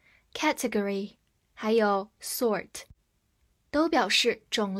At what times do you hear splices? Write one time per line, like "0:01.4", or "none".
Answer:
none